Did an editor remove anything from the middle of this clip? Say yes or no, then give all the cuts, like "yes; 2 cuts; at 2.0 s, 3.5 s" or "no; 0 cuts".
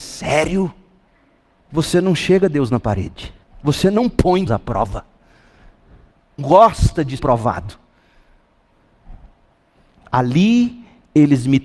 yes; 5 cuts; at 1.1 s, 3.4 s, 4.5 s, 6.4 s, 7.2 s